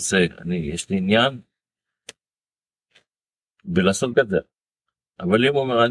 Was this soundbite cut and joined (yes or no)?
yes